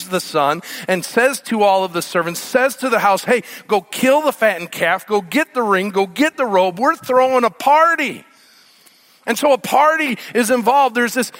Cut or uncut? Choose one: uncut